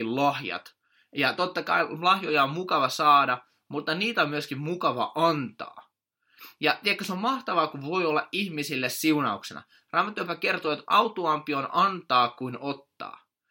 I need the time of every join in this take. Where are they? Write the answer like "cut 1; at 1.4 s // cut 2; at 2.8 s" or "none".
none